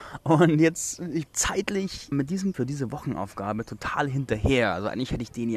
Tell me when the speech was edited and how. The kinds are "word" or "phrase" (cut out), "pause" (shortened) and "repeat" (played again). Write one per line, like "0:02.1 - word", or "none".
0:01.3 - word
0:02.1 - word
0:02.5 - word